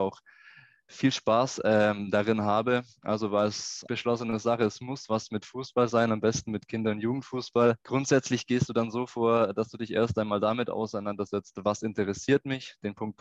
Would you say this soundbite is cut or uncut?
cut